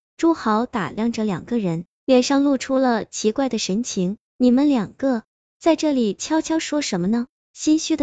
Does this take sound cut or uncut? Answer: uncut